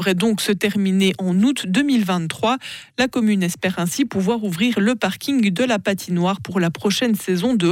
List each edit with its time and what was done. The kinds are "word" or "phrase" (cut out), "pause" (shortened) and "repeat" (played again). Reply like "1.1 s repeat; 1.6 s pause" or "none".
none